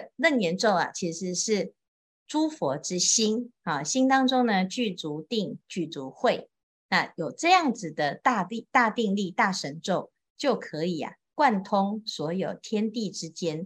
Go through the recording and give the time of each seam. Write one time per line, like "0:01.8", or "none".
none